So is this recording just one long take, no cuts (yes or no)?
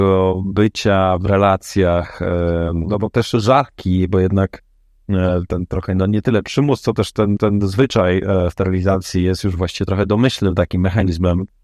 no